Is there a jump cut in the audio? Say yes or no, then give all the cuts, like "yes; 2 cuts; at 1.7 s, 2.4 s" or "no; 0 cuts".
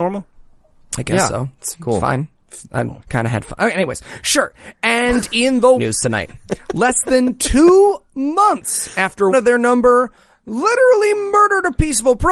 yes; 3 cuts; at 3.0 s, 5.8 s, 9.3 s